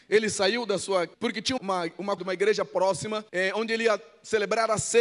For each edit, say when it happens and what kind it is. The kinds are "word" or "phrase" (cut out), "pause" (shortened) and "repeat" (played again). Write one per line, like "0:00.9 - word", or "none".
0:01.1 - word
0:01.6 - word
0:02.2 - word
0:03.3 - pause